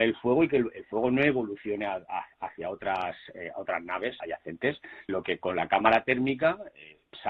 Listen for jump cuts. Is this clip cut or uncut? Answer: cut